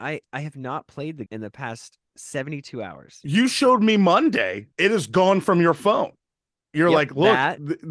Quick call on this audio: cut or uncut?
cut